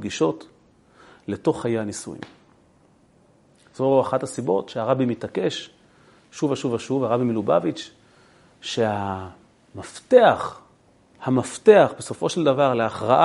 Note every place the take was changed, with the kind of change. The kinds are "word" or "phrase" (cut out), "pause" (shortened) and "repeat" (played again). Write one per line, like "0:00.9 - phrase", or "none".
none